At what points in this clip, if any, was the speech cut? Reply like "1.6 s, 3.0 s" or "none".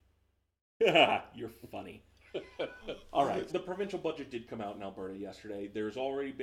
3.5 s